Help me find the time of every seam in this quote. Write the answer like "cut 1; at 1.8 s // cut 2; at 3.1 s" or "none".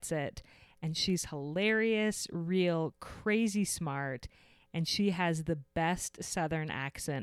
none